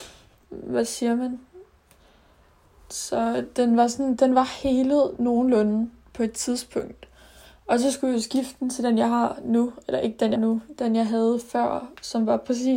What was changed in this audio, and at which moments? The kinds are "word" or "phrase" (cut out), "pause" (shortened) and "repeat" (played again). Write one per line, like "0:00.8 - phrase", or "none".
0:10.4 - word